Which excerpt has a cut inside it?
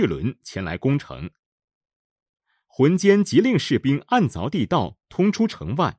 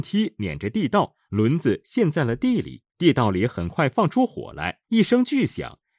second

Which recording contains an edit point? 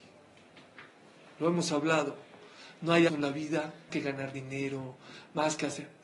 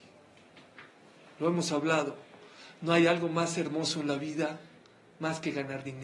first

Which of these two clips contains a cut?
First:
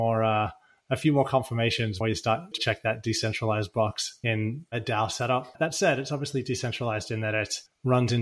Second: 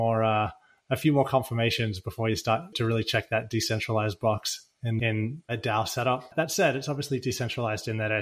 first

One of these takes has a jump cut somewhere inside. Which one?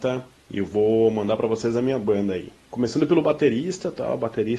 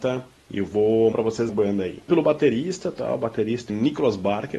second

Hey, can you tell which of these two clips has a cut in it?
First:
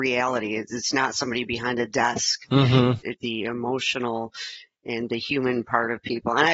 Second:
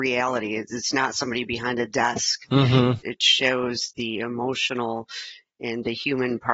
first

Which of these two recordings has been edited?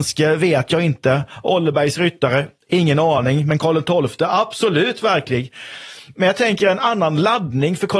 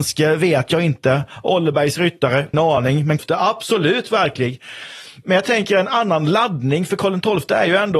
second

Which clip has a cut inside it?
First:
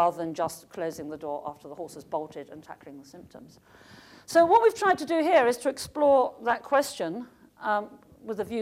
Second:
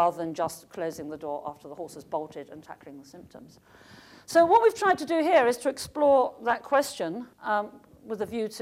second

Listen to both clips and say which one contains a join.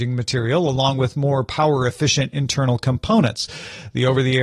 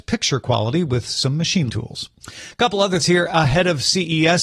second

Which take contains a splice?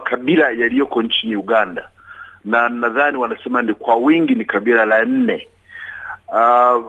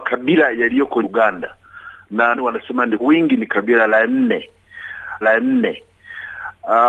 second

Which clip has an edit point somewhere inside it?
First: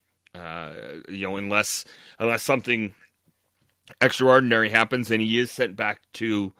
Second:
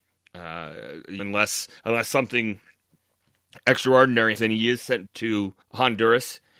second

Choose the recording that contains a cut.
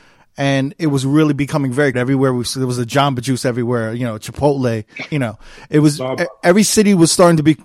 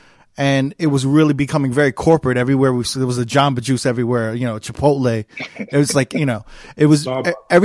first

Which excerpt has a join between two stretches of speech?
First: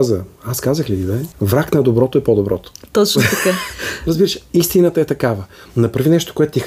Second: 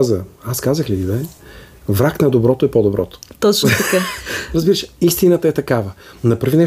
first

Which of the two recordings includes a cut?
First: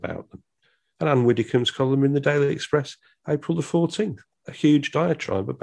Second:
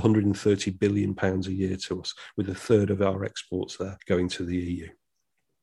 second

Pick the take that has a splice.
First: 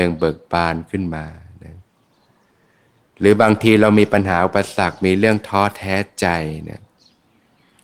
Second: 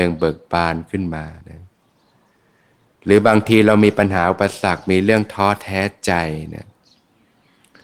second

